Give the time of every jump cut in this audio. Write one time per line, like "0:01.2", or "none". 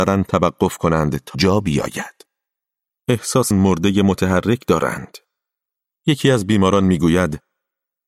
0:01.3
0:03.5